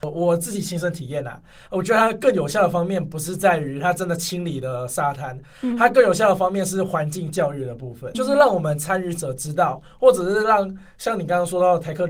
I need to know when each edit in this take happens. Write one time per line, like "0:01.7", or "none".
0:08.1